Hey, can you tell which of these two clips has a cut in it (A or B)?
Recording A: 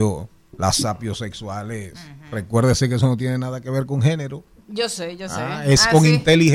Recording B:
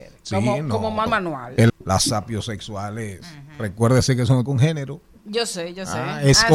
B